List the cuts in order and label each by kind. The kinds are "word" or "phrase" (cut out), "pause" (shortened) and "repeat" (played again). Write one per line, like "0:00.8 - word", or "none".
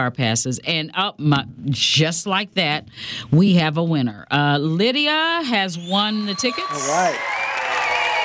none